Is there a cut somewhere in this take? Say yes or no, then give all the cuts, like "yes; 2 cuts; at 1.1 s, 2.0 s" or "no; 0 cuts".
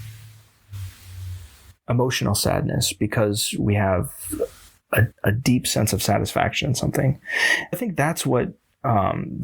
yes; 2 cuts; at 5.1 s, 7.7 s